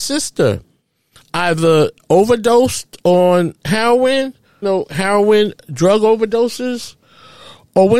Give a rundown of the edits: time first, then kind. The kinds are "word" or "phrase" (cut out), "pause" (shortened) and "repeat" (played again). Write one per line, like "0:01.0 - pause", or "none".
0:04.6 - phrase